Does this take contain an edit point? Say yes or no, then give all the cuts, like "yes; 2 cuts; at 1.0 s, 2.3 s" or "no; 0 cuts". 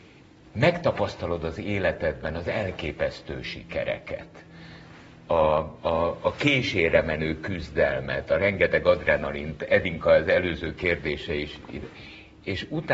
no; 0 cuts